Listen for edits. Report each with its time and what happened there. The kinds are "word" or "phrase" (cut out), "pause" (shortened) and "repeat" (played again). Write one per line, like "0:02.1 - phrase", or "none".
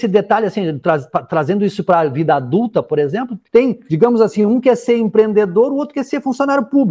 0:03.5 - pause